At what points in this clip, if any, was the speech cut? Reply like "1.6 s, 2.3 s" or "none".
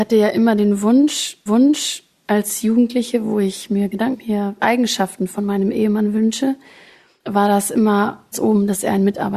1.5 s, 4.1 s, 4.6 s, 8.3 s